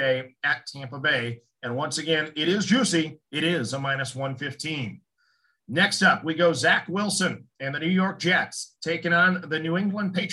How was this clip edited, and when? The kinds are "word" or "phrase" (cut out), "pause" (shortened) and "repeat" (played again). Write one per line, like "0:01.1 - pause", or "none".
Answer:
0:03.2 - pause